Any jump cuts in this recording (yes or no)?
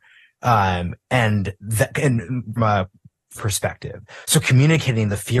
yes